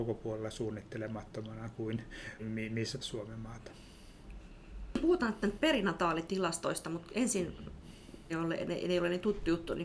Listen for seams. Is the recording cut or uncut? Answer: cut